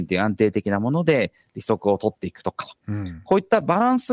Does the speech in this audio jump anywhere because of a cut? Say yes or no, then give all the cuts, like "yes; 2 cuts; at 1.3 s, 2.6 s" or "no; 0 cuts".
no; 0 cuts